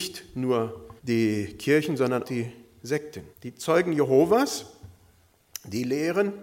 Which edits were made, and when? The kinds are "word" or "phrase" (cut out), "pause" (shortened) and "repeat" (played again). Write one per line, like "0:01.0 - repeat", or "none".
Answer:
0:01.0 - pause
0:02.2 - word
0:03.3 - pause